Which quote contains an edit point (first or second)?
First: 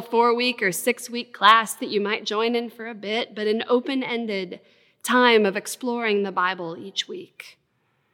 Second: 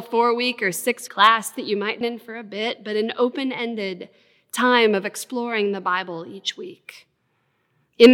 second